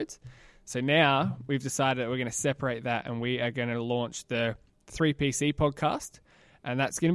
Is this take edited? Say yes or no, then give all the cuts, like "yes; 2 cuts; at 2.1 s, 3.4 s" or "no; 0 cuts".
no; 0 cuts